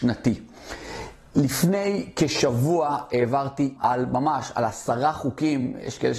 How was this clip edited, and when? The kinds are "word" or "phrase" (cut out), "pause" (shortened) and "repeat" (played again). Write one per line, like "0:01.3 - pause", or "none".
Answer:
0:03.8 - word